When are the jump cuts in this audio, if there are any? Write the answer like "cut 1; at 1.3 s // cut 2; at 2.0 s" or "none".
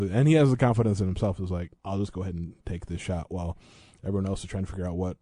cut 1; at 1.8 s